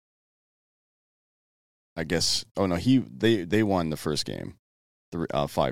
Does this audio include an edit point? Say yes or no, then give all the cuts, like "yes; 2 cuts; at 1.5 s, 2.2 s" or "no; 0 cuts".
no; 0 cuts